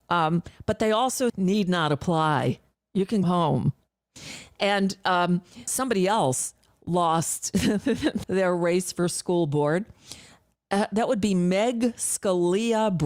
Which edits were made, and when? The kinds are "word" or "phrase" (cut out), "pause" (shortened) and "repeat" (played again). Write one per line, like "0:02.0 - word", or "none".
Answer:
0:01.3 - phrase
0:03.2 - word
0:05.7 - word
0:08.2 - word

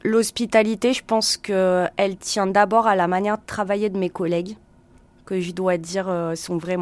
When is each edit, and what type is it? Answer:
none

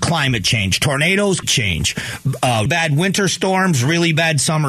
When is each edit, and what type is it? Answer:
0:01.4 - word
0:02.7 - word

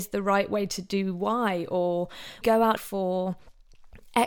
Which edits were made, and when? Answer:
0:02.4 - word
0:02.8 - word

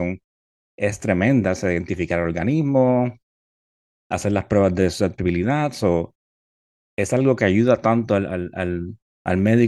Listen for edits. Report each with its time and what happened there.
none

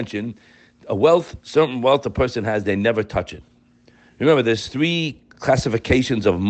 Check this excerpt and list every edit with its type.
none

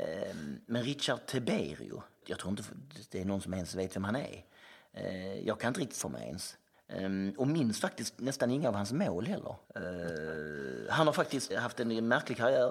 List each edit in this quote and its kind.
0:02.2 - word
0:06.0 - phrase
0:06.7 - pause
0:09.6 - pause
0:11.5 - word

